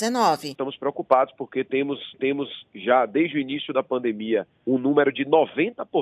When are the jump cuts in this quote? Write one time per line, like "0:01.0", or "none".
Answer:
0:02.1
0:04.5